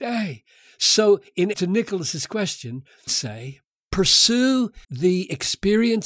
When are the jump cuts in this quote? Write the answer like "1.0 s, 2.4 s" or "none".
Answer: 1.5 s, 3.1 s, 4.8 s

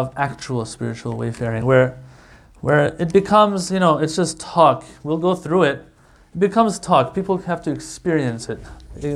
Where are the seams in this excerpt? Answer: none

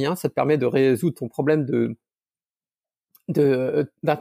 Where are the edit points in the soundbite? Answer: none

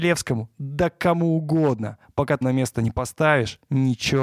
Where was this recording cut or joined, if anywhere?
2.4 s

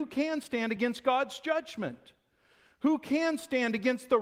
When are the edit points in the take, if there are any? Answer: none

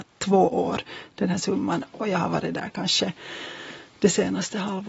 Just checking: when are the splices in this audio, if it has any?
none

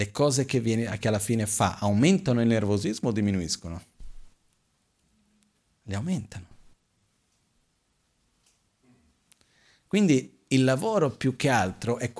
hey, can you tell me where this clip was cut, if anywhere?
none

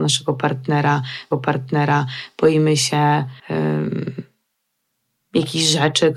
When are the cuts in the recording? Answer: 1.3 s, 3.4 s

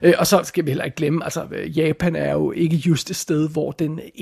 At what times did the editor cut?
none

